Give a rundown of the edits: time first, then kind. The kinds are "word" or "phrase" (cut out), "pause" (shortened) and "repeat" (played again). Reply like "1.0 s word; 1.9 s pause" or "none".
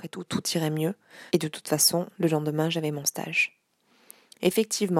1.3 s pause; 2.1 s pause